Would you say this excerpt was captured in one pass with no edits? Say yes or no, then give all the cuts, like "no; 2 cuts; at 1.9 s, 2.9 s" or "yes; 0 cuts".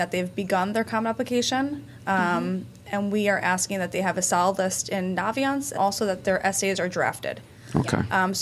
no; 1 cut; at 5.7 s